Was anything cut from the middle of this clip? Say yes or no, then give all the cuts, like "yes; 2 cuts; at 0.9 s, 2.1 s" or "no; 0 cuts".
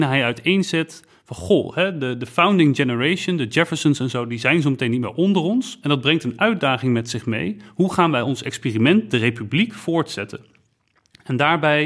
no; 0 cuts